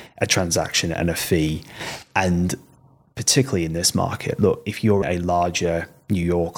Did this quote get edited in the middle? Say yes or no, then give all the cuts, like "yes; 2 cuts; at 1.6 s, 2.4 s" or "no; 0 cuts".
yes; 1 cut; at 5.0 s